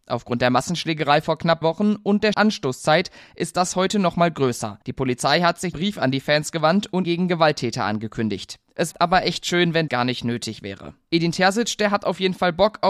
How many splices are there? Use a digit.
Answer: 7